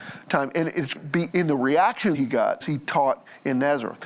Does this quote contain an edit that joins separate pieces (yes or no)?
yes